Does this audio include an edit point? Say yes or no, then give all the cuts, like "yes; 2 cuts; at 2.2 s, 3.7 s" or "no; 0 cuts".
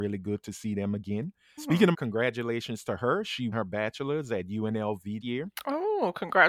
yes; 4 cuts; at 1.6 s, 1.9 s, 3.5 s, 5.2 s